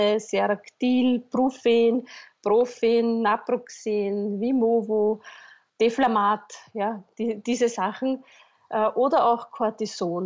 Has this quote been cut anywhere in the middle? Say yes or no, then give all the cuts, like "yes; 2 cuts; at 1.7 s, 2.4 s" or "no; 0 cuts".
no; 0 cuts